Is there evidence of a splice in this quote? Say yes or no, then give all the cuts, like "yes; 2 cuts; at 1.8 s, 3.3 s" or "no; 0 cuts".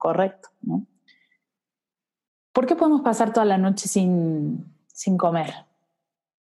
no; 0 cuts